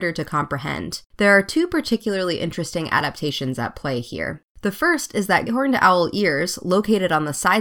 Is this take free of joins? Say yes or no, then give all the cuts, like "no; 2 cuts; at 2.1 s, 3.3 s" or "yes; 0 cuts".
no; 3 cuts; at 1.1 s, 4.5 s, 5.5 s